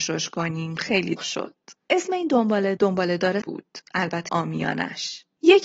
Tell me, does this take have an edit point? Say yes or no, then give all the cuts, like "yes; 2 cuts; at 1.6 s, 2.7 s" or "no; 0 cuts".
yes; 4 cuts; at 1.2 s, 2.8 s, 3.4 s, 4.3 s